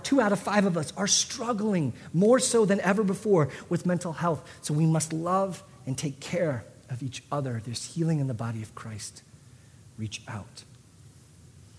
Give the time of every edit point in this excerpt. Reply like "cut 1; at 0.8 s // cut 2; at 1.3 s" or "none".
none

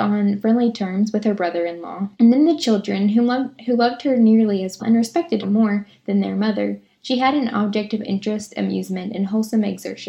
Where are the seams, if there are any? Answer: cut 1; at 2.1 s // cut 2; at 4.8 s // cut 3; at 5.4 s

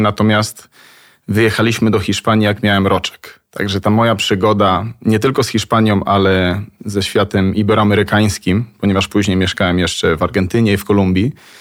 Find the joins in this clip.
cut 1; at 3.5 s

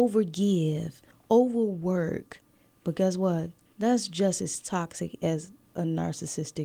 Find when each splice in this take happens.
none

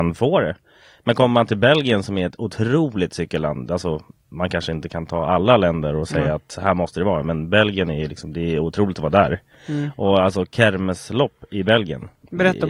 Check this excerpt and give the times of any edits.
none

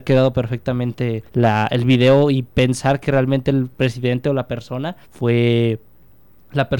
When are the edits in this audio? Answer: cut 1; at 1.3 s // cut 2; at 3.7 s // cut 3; at 5.0 s

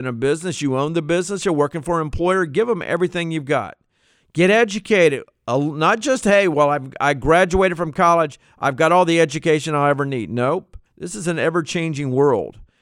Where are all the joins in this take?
cut 1; at 10.9 s

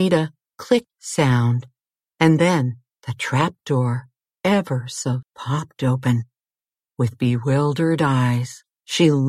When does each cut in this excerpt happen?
cut 1; at 5.2 s

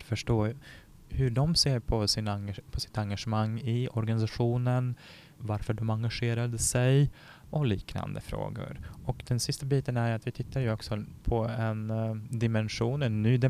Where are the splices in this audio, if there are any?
none

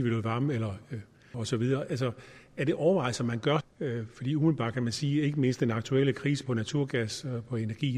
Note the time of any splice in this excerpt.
cut 1; at 1.3 s // cut 2; at 3.6 s

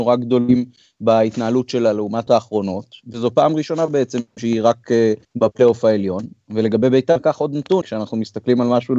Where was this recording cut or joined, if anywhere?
cut 1; at 2.3 s // cut 2; at 4.3 s // cut 3; at 5.2 s // cut 4; at 7.8 s

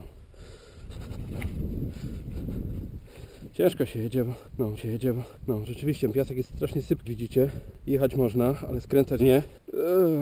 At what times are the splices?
cut 1; at 4.8 s // cut 2; at 6.5 s // cut 3; at 7.1 s // cut 4; at 9.2 s

